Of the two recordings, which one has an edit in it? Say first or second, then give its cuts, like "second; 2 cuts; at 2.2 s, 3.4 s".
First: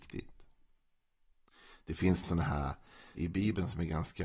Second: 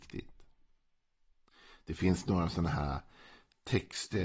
first; 2 cuts; at 2.2 s, 3.1 s